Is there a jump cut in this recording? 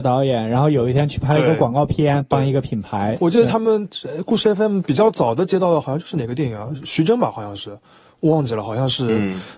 no; 0 cuts

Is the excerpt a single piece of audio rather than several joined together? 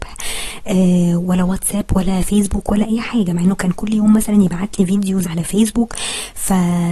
no; 1 cut; at 5.2 s

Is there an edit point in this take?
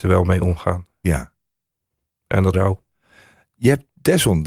yes; 1 cut; at 2.5 s

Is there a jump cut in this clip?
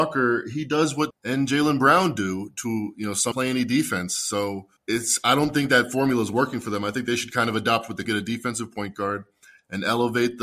yes; 4 cuts; at 1.1 s, 3.3 s, 4.8 s, 8.0 s

